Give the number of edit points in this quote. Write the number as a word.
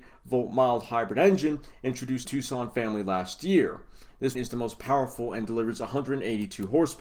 two